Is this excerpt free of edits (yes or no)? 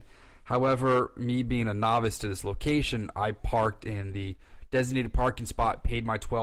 yes